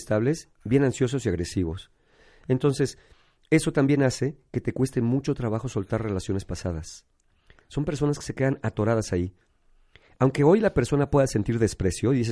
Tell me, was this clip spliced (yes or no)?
no